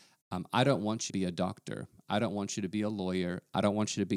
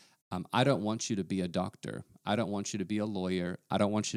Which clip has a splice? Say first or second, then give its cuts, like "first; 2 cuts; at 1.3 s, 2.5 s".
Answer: first; 1 cut; at 1.1 s